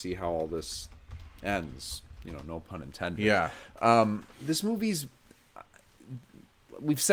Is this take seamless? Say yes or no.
no